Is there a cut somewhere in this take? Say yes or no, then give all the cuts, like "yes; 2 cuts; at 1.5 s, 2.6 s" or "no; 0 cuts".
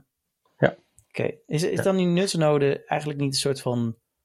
no; 0 cuts